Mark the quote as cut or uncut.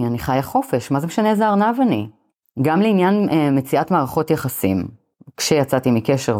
uncut